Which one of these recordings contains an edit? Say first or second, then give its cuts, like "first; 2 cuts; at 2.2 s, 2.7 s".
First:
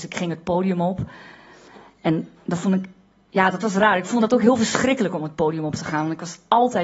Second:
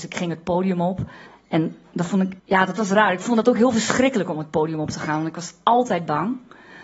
second; 2 cuts; at 1.3 s, 2.4 s